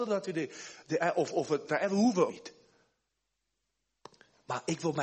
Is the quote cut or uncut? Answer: cut